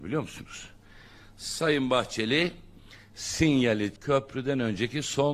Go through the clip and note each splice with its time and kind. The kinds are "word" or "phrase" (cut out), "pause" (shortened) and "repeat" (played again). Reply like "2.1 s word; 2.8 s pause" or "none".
3.9 s word